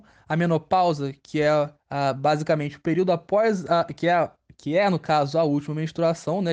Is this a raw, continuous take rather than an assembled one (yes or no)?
no